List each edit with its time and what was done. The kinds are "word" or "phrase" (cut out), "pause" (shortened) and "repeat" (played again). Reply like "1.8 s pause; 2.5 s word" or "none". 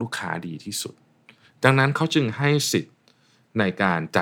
none